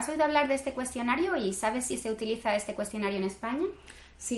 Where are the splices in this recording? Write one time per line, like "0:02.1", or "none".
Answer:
none